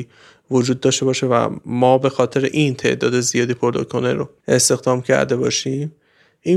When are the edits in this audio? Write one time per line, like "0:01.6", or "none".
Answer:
none